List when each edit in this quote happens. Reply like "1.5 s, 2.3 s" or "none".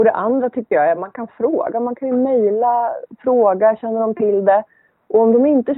none